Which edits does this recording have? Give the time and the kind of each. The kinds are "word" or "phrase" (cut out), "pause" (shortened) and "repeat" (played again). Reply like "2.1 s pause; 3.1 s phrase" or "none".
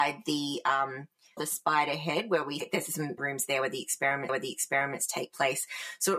1.4 s phrase; 2.6 s word; 3.2 s word; 4.3 s repeat

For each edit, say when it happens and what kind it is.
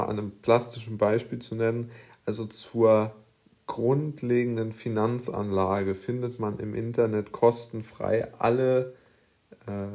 none

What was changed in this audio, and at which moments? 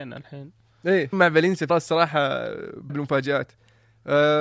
1.1 s word; 1.7 s word; 2.9 s word

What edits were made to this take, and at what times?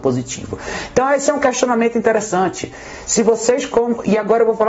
none

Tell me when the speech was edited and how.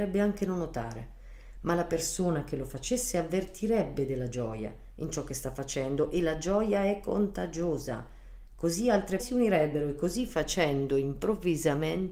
9.2 s word

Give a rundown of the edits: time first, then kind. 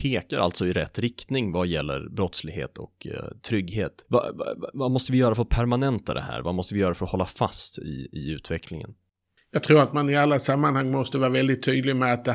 4.0 s pause

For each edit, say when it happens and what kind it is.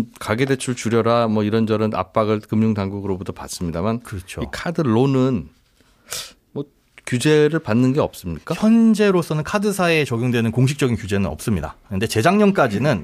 none

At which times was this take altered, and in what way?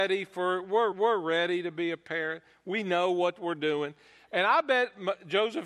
0.9 s repeat

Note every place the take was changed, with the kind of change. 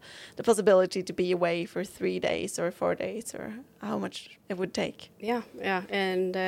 4.4 s pause

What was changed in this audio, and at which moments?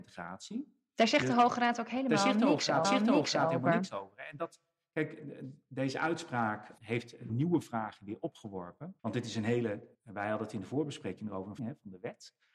2.8 s repeat; 6.8 s word; 7.3 s word; 9.0 s pause; 9.9 s pause; 11.6 s phrase

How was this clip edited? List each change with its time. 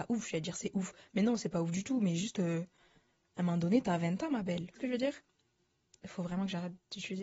4.8 s word

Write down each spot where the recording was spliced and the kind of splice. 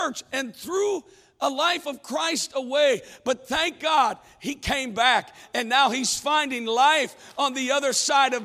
none

